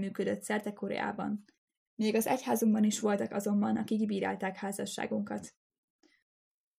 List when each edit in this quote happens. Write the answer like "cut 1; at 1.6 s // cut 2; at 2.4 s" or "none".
none